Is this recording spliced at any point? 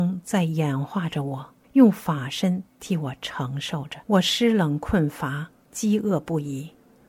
yes; 2 cuts; at 1.6 s, 4.0 s

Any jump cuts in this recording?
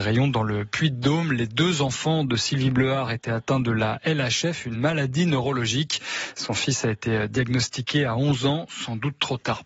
no; 0 cuts

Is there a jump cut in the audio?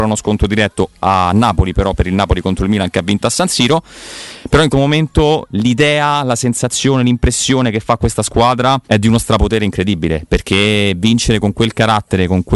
yes; 3 cuts; at 1.9 s, 4.7 s, 8.8 s

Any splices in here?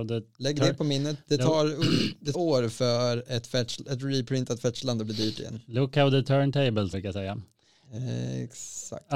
yes; 2 cuts; at 2.3 s, 6.9 s

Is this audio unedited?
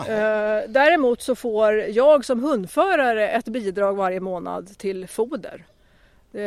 yes; 0 cuts

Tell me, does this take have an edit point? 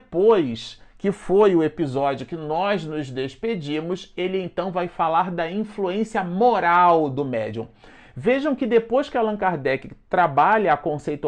no; 0 cuts

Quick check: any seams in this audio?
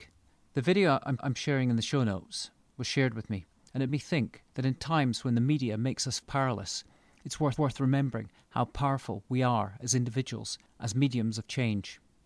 yes; 5 cuts; at 1.2 s, 3.9 s, 4.5 s, 6.2 s, 7.6 s

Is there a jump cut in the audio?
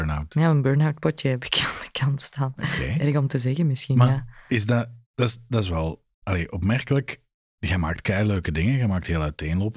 yes; 3 cuts; at 5.0 s, 6.1 s, 7.4 s

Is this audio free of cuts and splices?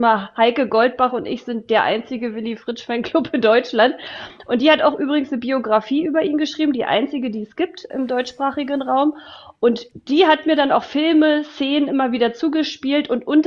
yes; 0 cuts

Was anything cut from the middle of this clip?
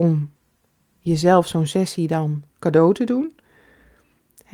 yes; 1 cut; at 2.5 s

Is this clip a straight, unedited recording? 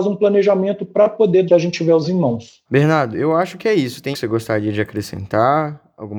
no; 4 cuts; at 1.5 s, 2.0 s, 2.6 s, 4.1 s

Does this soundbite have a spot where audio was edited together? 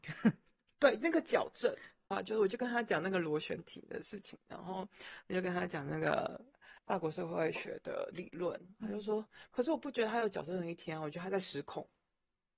yes; 1 cut; at 6.8 s

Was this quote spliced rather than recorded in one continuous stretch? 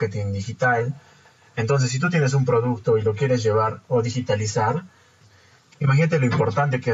no; 0 cuts

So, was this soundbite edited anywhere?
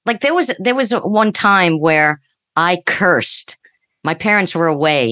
no; 0 cuts

